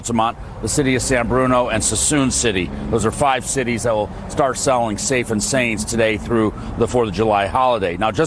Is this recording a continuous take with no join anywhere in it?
yes; 0 cuts

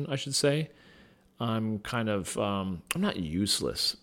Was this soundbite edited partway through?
no; 0 cuts

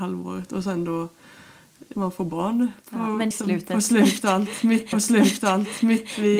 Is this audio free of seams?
no; 4 cuts; at 1.9 s, 2.8 s, 3.3 s, 4.9 s

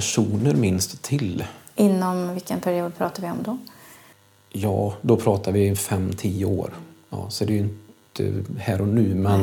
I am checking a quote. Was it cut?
no; 0 cuts

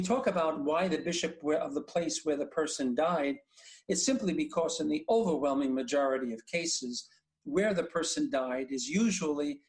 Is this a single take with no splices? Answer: yes; 0 cuts

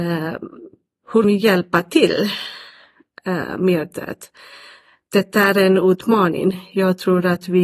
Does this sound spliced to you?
yes; 1 cut; at 1.2 s

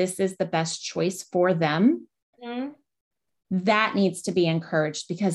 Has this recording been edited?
no; 0 cuts

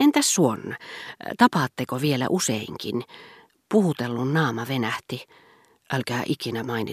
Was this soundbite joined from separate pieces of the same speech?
no; 0 cuts

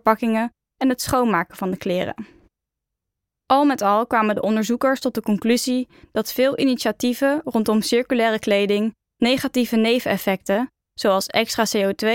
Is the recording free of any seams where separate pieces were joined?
yes; 0 cuts

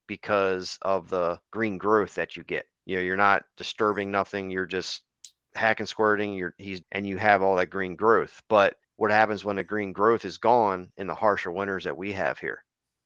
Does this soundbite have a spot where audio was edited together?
yes; 4 cuts; at 1.5 s, 2.8 s, 6.8 s, 8.8 s

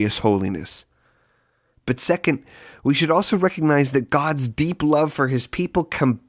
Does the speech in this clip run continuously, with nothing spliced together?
yes; 0 cuts

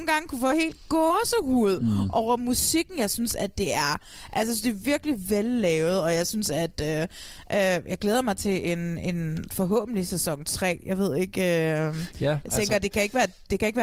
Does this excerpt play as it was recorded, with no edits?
yes; 0 cuts

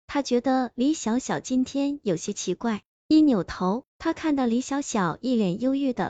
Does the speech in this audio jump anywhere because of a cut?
yes; 1 cut; at 3.9 s

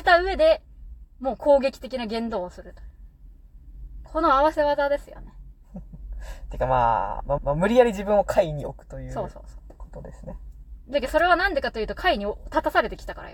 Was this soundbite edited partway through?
yes; 1 cut; at 7.4 s

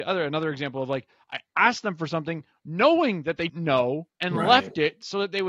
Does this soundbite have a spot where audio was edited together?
yes; 2 cuts; at 3.5 s, 4.1 s

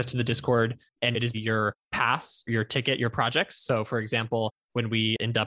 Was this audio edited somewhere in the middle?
yes; 2 cuts; at 1.3 s, 3.1 s

